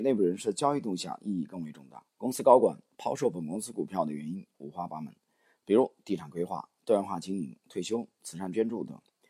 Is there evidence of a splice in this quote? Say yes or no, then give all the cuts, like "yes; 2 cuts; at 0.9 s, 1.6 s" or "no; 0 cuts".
yes; 1 cut; at 2.1 s